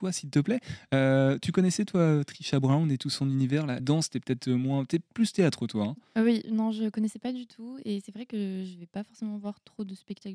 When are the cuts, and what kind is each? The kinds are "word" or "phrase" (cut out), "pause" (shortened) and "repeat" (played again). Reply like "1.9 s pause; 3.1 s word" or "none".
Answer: 3.8 s word